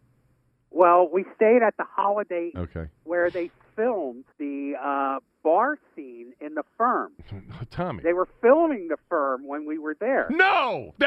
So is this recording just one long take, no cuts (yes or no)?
no